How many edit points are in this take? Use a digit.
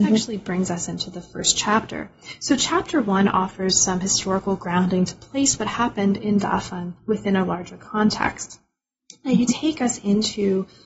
1